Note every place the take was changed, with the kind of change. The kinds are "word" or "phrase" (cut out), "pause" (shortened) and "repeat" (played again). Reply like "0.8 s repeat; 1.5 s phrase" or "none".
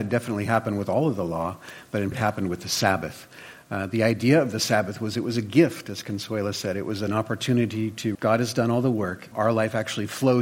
2.1 s word; 8.1 s word; 9.3 s word